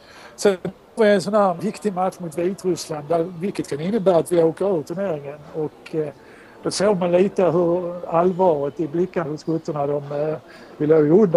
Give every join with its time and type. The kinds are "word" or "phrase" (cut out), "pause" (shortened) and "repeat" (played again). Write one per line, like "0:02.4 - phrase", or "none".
0:01.0 - word
0:01.6 - word
0:09.3 - word